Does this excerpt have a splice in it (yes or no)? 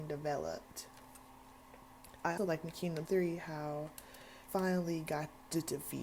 yes